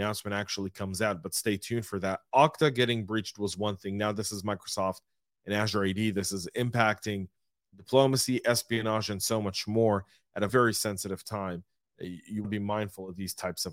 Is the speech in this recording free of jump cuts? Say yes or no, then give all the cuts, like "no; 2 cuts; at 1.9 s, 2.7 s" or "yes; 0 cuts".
no; 2 cuts; at 10.5 s, 12.4 s